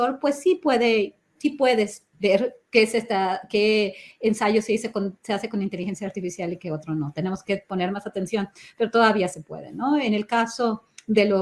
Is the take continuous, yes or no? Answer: yes